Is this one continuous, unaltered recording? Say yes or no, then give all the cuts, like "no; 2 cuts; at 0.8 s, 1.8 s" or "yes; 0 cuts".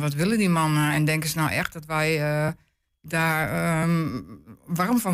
yes; 0 cuts